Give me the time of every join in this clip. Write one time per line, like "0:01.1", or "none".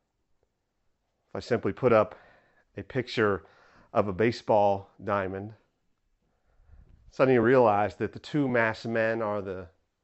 none